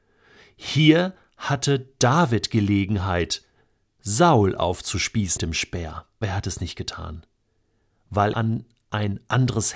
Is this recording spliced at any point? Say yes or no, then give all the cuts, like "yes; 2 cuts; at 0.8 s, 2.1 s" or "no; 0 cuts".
yes; 3 cuts; at 5.4 s, 6.2 s, 8.3 s